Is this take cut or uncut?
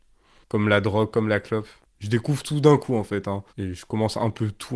cut